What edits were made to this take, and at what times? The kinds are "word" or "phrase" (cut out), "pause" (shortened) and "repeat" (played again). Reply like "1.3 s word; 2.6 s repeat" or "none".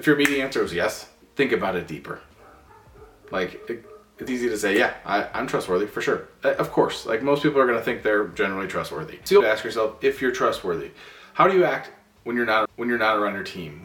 4.3 s word; 9.4 s phrase; 12.7 s repeat